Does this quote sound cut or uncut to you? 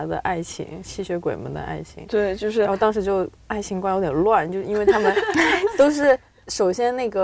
cut